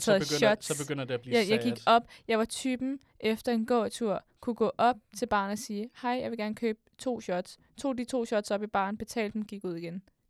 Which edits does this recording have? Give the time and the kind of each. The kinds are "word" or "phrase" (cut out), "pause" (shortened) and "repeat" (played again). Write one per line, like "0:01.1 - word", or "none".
0:04.3 - pause